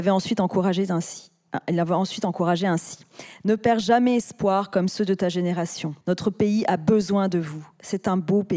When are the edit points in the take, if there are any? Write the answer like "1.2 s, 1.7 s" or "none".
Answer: 6.0 s